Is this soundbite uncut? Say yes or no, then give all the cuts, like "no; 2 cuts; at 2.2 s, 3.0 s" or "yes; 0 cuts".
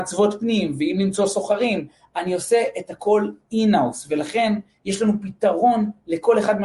yes; 0 cuts